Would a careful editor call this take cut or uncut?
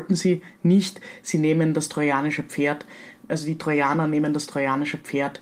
uncut